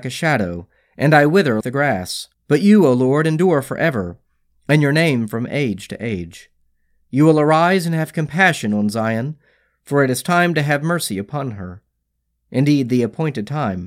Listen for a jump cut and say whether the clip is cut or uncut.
cut